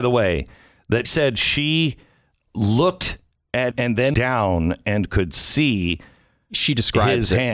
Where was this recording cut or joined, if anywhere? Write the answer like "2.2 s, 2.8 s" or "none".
1.0 s, 3.7 s, 4.1 s